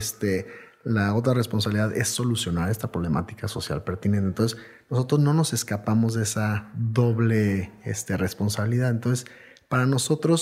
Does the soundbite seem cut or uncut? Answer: uncut